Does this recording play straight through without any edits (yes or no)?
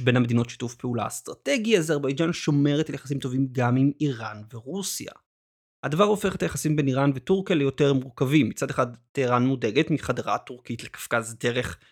yes